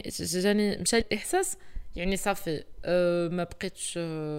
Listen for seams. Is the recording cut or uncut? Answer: cut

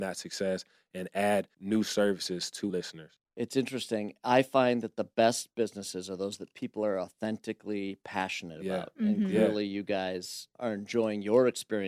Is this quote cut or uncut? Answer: cut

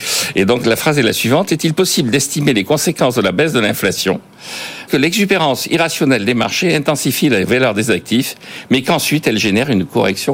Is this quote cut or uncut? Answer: cut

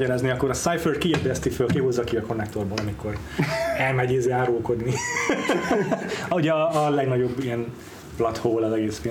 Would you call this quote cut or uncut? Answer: uncut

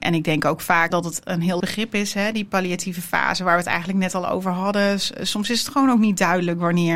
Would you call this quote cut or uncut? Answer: cut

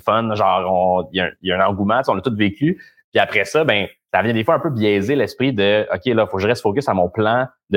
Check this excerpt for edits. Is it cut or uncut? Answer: uncut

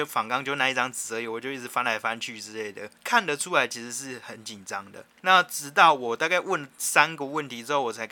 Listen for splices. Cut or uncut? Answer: cut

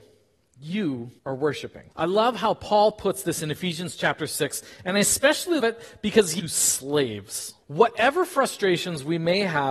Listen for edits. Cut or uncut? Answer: cut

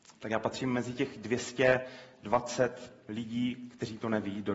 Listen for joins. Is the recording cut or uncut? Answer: uncut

